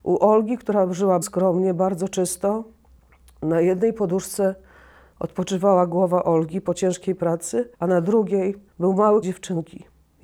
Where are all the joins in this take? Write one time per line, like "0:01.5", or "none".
0:01.2
0:02.9
0:07.7
0:08.7
0:09.2